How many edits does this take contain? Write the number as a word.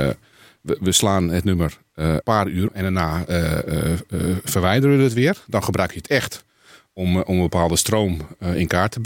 two